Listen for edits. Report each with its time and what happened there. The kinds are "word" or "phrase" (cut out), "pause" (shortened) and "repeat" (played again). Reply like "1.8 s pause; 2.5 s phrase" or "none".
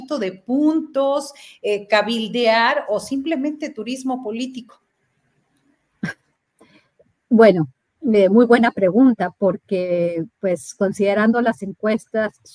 none